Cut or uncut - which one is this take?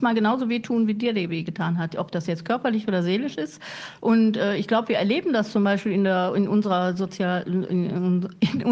uncut